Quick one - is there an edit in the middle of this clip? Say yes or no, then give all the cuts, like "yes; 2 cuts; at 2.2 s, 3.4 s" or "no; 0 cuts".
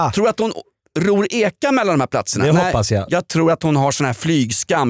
no; 0 cuts